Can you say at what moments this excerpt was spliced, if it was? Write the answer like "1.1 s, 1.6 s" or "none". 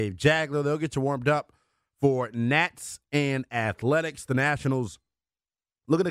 none